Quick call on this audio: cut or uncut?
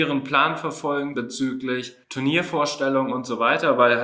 cut